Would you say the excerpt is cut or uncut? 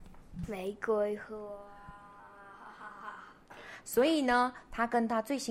uncut